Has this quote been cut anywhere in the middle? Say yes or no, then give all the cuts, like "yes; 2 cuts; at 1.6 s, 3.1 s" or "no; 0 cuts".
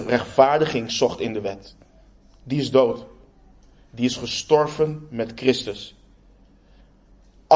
no; 0 cuts